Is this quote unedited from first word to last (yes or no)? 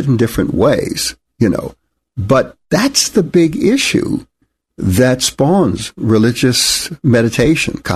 yes